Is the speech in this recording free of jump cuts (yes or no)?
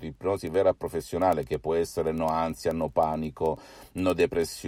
yes